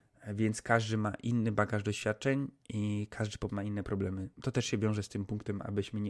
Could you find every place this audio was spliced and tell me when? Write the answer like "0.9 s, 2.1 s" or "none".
2.6 s, 3.5 s, 4.3 s